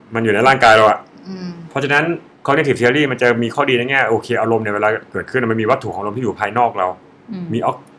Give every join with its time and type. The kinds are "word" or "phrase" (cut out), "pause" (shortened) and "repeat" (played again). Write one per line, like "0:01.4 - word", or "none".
0:02.3 - pause

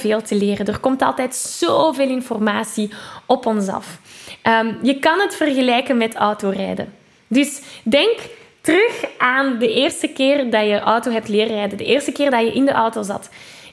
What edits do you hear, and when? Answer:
none

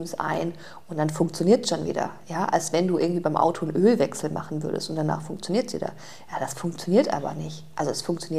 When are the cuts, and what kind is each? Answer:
none

